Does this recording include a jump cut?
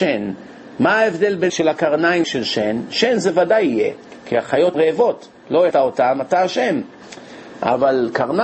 yes; 4 cuts; at 1.5 s, 2.2 s, 4.7 s, 5.7 s

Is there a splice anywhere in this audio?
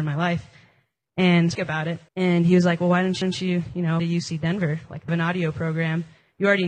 yes; 5 cuts; at 1.5 s, 2.1 s, 3.2 s, 4.0 s, 5.1 s

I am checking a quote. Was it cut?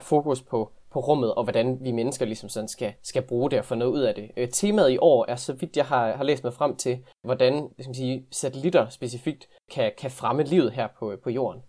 yes; 1 cut; at 3.0 s

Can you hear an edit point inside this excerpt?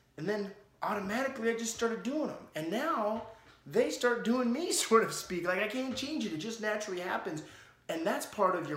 no; 0 cuts

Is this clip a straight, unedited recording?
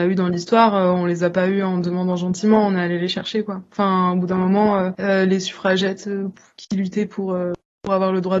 yes; 0 cuts

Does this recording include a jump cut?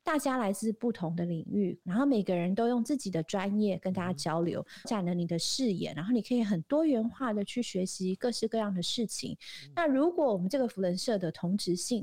yes; 2 cuts; at 1.8 s, 4.8 s

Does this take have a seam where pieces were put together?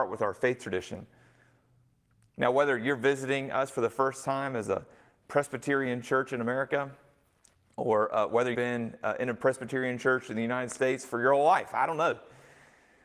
yes; 1 cut; at 8.5 s

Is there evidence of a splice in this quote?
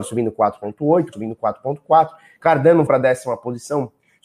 yes; 2 cuts; at 1.1 s, 2.9 s

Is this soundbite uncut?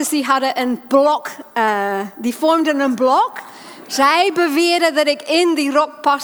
yes; 0 cuts

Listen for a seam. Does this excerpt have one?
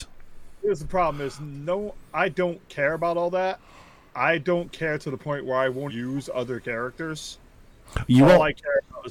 yes; 1 cut; at 5.9 s

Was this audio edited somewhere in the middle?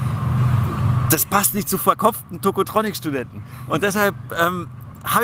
no; 0 cuts

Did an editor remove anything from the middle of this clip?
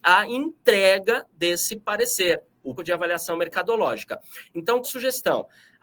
yes; 2 cuts; at 2.8 s, 4.8 s

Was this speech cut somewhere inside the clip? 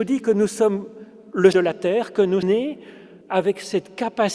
yes; 3 cuts; at 1.5 s, 2.4 s, 3.2 s

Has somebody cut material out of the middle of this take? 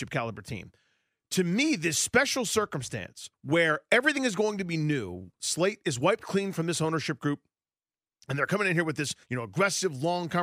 yes; 2 cuts; at 3.3 s, 9.2 s

